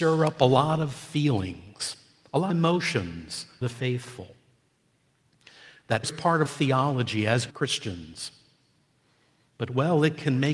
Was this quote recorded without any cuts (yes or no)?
no